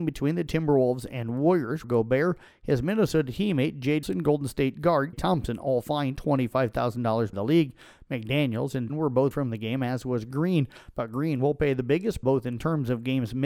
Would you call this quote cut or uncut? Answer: cut